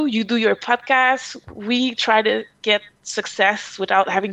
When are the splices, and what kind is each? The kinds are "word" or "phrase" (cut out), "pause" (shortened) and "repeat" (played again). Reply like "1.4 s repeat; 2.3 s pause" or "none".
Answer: none